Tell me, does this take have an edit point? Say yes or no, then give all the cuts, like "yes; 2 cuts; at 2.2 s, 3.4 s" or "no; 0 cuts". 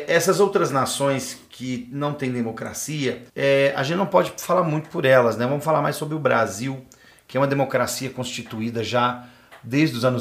yes; 1 cut; at 3.3 s